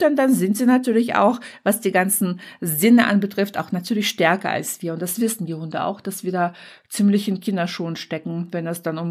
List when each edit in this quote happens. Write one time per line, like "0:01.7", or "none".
none

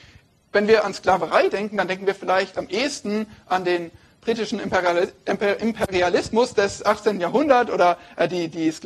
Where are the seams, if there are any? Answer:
none

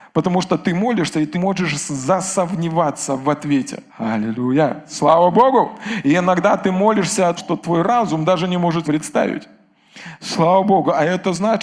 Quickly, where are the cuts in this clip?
0:01.3
0:03.9
0:07.4
0:08.8

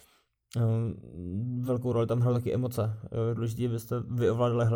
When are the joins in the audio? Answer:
none

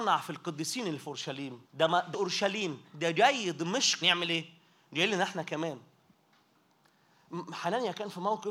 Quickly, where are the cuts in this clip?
0:01.7
0:02.1
0:04.0

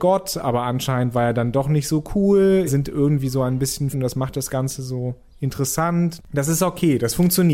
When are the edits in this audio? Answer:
0:02.7
0:03.9

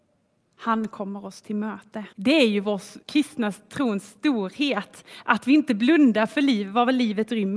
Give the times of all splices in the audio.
0:02.1
0:03.0

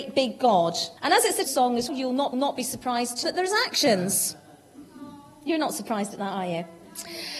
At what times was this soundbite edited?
0:01.0
0:01.5
0:01.9
0:02.3
0:03.2

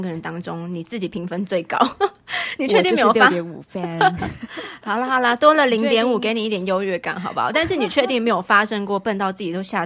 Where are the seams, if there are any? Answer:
none

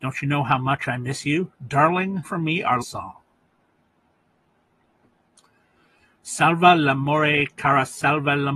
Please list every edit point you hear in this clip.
0:02.2
0:02.8

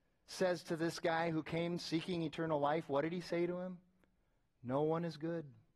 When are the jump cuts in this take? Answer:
none

